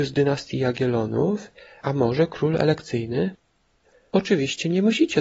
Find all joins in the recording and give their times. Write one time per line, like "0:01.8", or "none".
none